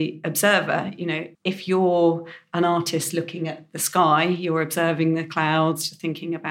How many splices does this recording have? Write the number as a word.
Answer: one